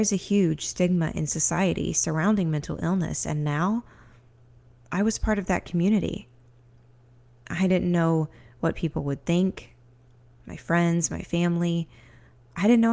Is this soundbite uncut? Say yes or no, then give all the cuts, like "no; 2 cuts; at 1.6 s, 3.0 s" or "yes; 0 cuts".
yes; 0 cuts